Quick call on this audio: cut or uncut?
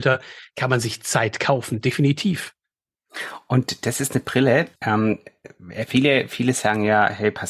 cut